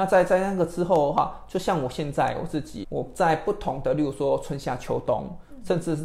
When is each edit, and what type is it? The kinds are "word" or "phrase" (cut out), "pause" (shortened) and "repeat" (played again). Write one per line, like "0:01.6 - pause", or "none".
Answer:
0:02.8 - word